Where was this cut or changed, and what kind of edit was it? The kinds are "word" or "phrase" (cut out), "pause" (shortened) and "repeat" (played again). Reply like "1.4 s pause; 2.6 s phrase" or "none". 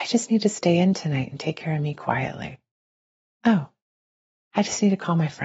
none